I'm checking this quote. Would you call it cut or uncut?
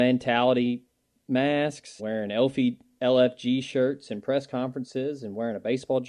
cut